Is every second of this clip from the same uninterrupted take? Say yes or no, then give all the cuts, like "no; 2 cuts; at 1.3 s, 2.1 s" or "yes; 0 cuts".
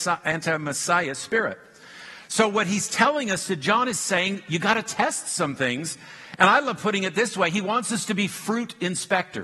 yes; 0 cuts